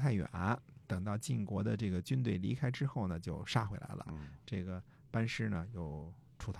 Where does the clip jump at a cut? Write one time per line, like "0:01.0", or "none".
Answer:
none